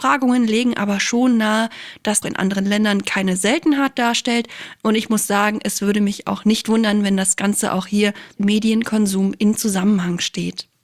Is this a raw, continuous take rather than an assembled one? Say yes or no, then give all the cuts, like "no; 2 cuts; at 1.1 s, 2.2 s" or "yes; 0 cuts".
no; 2 cuts; at 2.2 s, 8.4 s